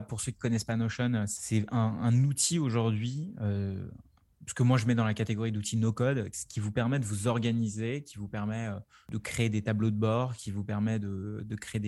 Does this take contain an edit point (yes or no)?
no